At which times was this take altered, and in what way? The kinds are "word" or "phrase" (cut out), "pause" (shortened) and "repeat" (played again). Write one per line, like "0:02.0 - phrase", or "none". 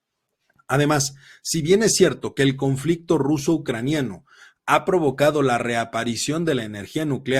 none